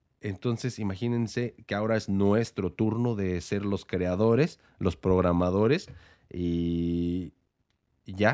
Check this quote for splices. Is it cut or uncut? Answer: uncut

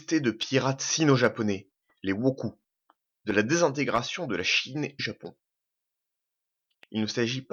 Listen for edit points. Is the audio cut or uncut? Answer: cut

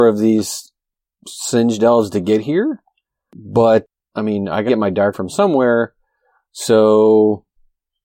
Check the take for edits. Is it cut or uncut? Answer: cut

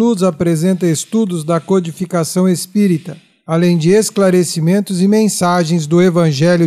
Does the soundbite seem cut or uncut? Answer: uncut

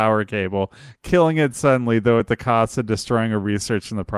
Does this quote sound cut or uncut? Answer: uncut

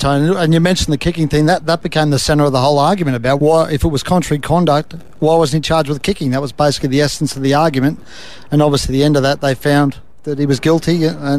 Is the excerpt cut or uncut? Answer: cut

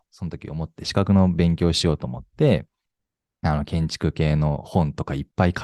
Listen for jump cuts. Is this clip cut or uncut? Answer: uncut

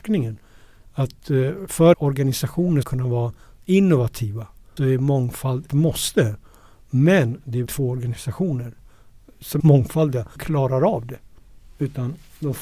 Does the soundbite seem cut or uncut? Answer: cut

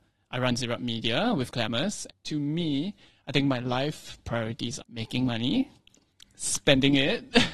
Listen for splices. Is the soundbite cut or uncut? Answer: cut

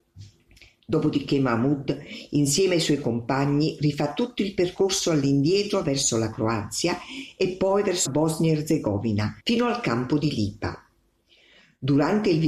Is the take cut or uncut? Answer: cut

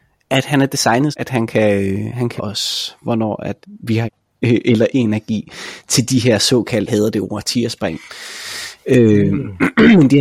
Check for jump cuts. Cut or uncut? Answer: cut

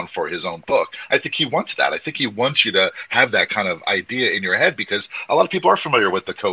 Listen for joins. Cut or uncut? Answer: uncut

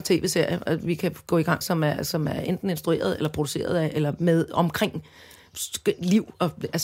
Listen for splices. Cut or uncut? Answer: cut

